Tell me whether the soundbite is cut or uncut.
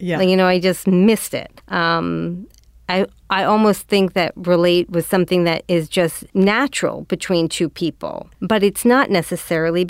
cut